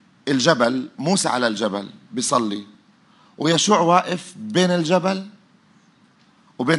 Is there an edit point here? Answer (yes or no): no